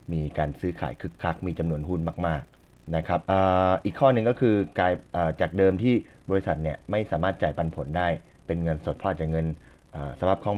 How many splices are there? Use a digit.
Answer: 1